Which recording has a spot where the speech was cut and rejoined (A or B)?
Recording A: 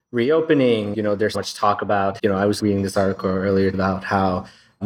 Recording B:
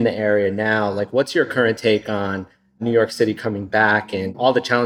A